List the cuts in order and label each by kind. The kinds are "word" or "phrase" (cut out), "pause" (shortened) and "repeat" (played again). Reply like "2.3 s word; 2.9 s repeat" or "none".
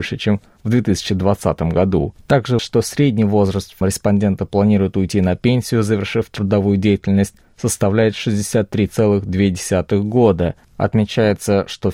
2.6 s word; 3.8 s word